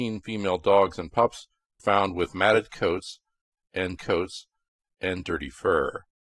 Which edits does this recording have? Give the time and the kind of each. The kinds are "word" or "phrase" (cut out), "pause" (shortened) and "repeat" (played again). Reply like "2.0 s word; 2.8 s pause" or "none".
1.8 s word; 4.0 s repeat